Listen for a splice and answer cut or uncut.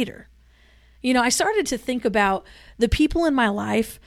uncut